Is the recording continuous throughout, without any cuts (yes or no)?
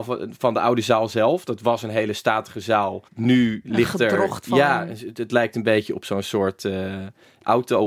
no